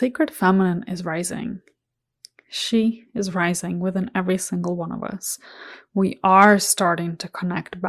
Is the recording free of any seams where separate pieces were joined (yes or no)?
yes